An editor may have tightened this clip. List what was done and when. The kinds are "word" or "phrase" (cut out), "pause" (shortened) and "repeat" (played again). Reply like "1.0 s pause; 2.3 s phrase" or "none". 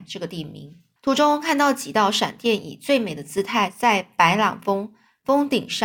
1.0 s pause